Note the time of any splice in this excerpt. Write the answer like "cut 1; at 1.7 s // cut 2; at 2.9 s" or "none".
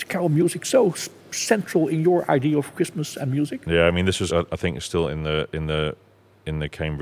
cut 1; at 4.3 s